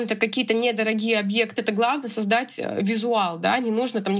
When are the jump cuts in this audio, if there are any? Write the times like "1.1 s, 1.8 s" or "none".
1.6 s